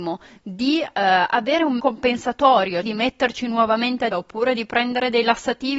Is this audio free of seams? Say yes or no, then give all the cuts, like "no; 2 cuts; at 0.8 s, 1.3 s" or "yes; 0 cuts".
no; 3 cuts; at 1.8 s, 2.8 s, 4.1 s